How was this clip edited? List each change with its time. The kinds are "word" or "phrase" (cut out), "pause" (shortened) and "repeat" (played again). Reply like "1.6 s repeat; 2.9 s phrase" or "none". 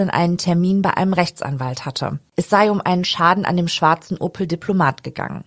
2.3 s pause